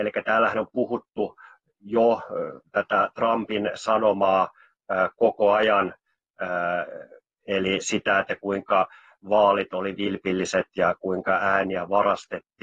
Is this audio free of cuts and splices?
yes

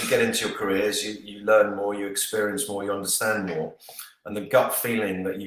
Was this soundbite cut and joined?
no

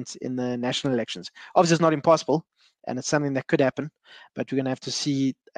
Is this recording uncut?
yes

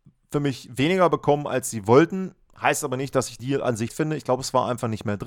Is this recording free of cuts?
no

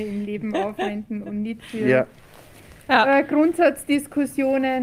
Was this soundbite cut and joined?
no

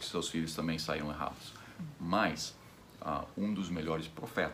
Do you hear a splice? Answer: no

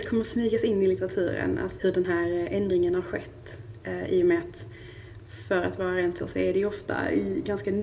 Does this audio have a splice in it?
yes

